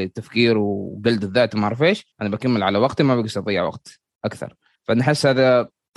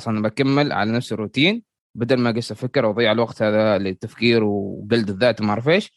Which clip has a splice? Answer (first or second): first